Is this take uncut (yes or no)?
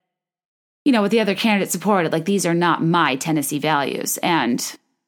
yes